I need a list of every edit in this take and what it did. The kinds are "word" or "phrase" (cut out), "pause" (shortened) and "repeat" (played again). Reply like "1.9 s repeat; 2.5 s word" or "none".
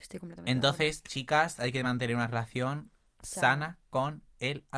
none